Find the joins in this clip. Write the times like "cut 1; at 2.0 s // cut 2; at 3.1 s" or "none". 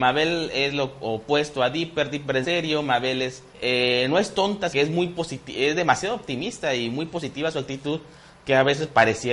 cut 1; at 2.4 s // cut 2; at 3.5 s // cut 3; at 4.7 s